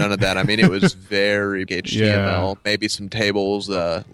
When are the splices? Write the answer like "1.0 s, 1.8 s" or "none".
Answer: 1.7 s